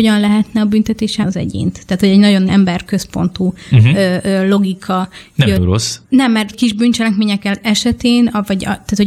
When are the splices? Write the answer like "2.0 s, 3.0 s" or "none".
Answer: 1.2 s, 2.5 s, 5.6 s, 6.0 s, 6.5 s